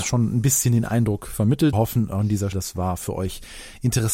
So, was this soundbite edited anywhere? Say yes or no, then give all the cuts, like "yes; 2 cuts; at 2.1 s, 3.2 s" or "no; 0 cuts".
yes; 2 cuts; at 1.7 s, 2.5 s